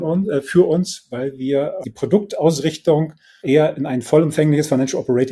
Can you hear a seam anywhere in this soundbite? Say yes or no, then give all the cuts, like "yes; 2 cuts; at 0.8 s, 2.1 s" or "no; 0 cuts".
yes; 2 cuts; at 1.8 s, 3.4 s